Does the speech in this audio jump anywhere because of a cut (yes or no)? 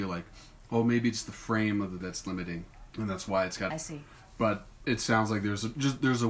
yes